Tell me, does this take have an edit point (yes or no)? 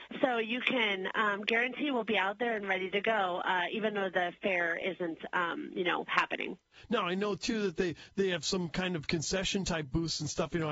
no